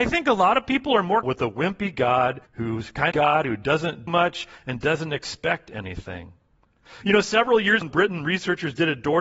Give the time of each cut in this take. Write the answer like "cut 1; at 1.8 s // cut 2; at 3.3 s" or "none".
cut 1; at 1.2 s // cut 2; at 2.5 s // cut 3; at 3.1 s // cut 4; at 4.1 s // cut 5; at 7.8 s

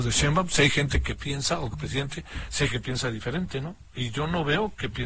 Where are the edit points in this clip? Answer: cut 1; at 1.7 s // cut 2; at 2.7 s

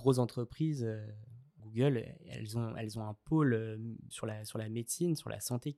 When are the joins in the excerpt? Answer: cut 1; at 1.6 s // cut 2; at 4.1 s

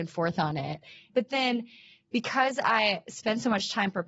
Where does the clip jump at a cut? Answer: none

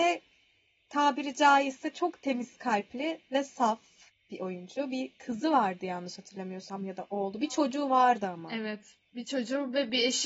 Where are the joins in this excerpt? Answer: none

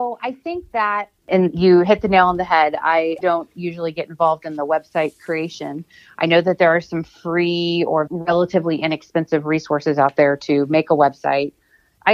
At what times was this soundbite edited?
cut 1; at 8.1 s

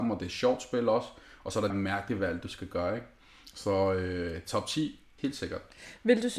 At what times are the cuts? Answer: cut 1; at 1.7 s // cut 2; at 5.2 s

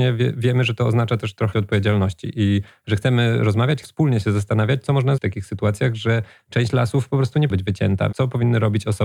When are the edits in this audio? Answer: cut 1; at 1.5 s // cut 2; at 3.8 s // cut 3; at 5.2 s // cut 4; at 7.5 s // cut 5; at 8.1 s

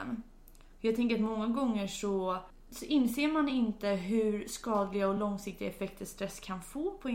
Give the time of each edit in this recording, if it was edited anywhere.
none

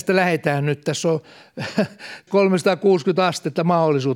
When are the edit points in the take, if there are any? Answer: cut 1; at 2.3 s

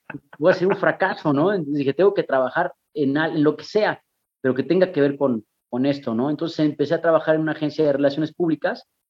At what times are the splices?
none

